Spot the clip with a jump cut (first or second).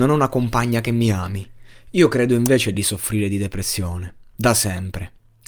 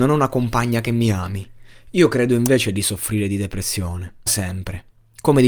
second